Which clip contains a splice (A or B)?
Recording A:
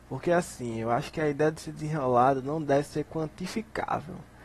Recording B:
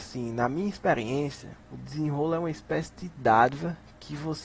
B